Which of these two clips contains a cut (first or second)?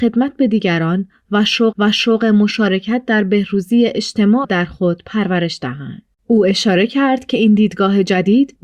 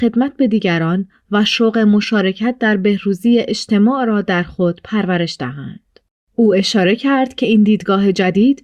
first